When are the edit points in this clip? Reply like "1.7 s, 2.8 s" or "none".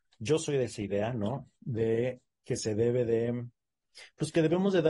none